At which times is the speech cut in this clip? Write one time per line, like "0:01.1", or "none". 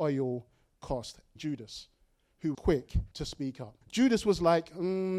0:01.4
0:02.5
0:03.1
0:03.8